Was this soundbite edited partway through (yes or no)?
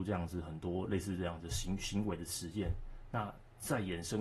no